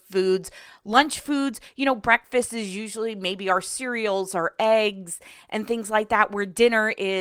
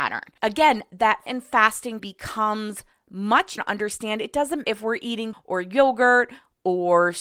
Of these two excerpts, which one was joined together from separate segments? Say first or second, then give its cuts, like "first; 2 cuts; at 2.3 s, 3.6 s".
second; 5 cuts; at 1.3 s, 2.0 s, 3.6 s, 4.6 s, 5.3 s